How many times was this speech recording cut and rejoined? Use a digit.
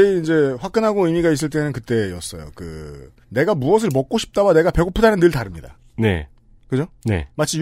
1